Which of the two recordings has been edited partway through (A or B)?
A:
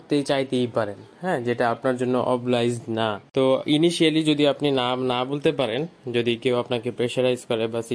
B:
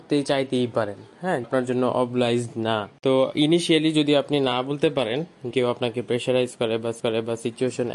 B